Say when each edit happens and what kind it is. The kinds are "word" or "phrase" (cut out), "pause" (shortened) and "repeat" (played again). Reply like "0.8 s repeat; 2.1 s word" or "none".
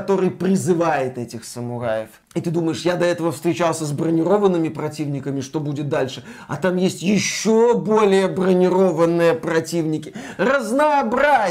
none